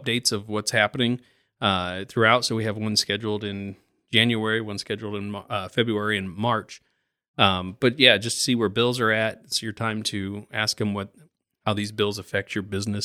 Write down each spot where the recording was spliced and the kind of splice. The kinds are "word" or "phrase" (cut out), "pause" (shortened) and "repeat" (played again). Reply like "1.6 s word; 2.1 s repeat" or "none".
none